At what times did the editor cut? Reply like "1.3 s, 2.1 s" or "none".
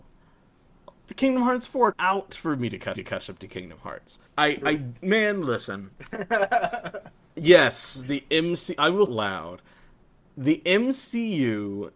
1.9 s, 2.9 s, 4.3 s, 5.9 s, 9.1 s